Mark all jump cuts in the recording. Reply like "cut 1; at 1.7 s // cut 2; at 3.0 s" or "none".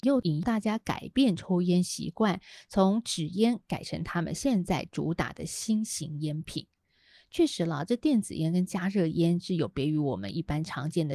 none